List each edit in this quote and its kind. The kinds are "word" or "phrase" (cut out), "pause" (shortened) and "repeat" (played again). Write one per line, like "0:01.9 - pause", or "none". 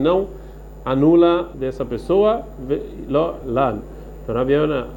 0:01.5 - phrase
0:03.4 - word